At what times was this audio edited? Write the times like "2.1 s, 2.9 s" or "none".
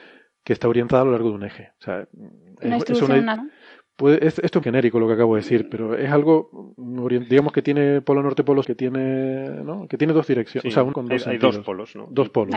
3.4 s, 4.6 s, 8.6 s, 10.9 s